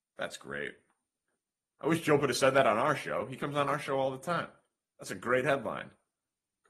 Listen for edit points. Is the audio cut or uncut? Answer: cut